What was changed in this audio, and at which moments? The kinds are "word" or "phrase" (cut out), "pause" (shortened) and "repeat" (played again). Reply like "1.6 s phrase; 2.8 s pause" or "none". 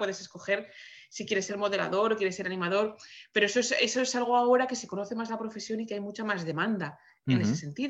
none